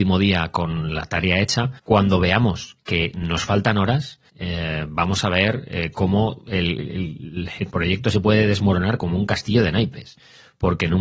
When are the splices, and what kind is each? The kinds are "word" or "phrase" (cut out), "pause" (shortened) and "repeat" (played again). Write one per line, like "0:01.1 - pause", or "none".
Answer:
0:01.8 - pause
0:04.3 - pause